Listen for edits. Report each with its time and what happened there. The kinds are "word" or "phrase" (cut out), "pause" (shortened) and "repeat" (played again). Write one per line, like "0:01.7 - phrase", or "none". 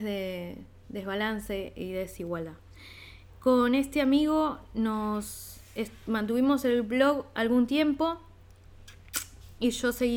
none